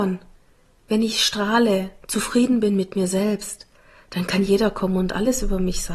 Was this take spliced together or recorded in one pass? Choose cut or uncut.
uncut